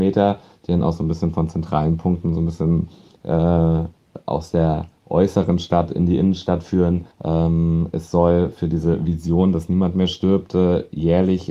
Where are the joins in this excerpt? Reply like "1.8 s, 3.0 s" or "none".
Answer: 7.1 s